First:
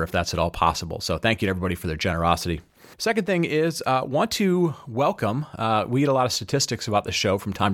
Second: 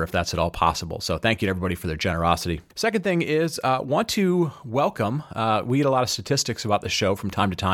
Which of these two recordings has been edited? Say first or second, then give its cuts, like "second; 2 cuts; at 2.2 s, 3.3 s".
second; 1 cut; at 2.7 s